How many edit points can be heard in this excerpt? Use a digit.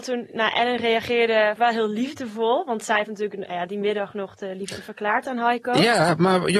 2